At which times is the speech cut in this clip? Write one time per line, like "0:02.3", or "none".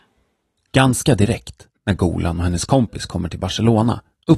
0:01.8